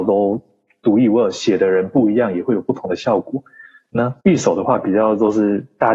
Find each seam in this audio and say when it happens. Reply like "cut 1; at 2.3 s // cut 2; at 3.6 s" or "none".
cut 1; at 4.2 s